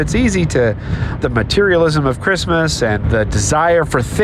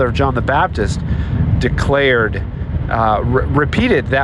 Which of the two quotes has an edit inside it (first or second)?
first